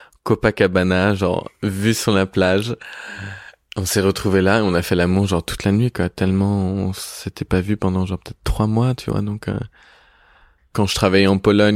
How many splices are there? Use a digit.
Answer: 0